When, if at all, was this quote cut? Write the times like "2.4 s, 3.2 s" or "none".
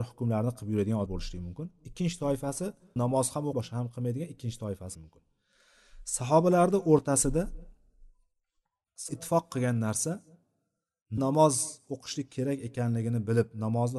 1.1 s, 3.0 s, 3.5 s, 4.9 s, 9.1 s, 11.2 s